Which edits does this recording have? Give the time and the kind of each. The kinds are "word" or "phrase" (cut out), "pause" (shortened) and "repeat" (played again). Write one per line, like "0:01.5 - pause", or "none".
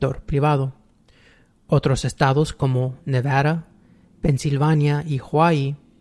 none